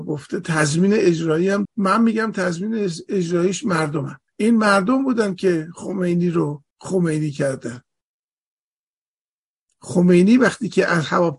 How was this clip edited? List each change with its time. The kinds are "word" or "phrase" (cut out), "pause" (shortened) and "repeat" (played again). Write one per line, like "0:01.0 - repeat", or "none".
0:01.6 - word
0:04.3 - pause
0:06.7 - pause